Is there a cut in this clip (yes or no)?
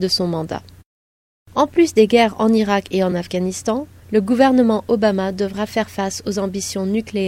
no